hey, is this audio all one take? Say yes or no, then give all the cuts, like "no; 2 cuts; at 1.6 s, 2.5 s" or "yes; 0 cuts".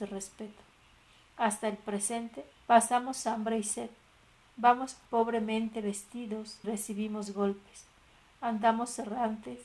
no; 3 cuts; at 2.5 s, 5.1 s, 6.6 s